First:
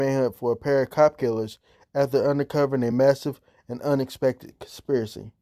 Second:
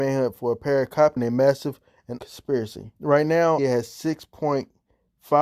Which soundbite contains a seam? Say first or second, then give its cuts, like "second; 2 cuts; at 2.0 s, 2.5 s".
second; 4 cuts; at 1.2 s, 2.2 s, 3.0 s, 3.6 s